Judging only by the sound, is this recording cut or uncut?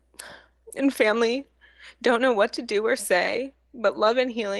uncut